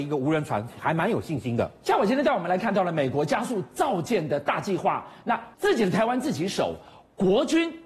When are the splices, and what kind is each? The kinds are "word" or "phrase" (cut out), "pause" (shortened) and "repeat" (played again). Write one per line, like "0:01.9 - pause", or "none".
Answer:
0:05.5 - pause